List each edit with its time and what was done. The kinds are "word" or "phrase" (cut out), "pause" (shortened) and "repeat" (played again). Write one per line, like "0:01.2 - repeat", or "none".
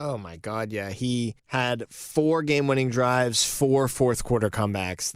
0:01.4 - pause